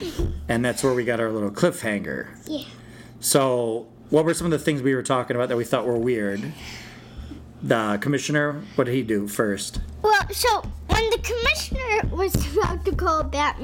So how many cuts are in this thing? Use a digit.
0